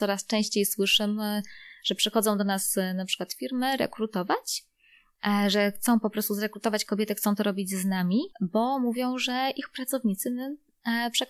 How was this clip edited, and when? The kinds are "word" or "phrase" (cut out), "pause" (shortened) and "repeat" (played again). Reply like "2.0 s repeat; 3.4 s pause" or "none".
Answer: 8.3 s pause